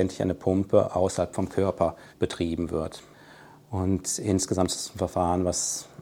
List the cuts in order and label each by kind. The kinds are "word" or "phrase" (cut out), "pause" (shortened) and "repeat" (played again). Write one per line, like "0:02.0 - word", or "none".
0:02.1 - pause